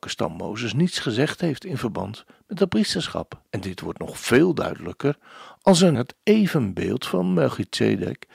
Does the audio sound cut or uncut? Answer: cut